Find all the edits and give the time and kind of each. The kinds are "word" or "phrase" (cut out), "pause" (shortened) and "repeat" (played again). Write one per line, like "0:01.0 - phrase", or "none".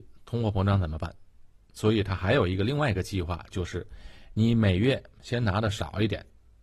0:01.5 - pause